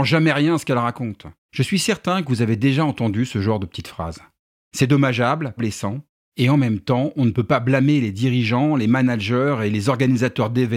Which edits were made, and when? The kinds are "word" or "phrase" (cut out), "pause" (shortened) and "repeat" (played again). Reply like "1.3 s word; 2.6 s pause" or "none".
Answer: 1.4 s pause; 5.6 s word

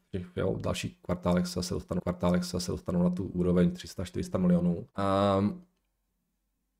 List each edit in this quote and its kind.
2.0 s repeat; 4.9 s pause

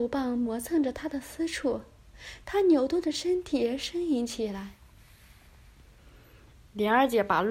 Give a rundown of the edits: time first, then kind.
none

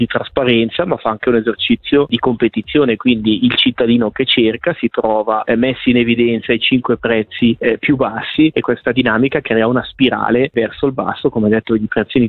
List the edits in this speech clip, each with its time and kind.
none

